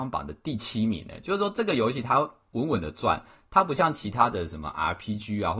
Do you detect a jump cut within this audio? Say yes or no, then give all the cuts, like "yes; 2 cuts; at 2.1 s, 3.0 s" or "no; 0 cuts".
no; 0 cuts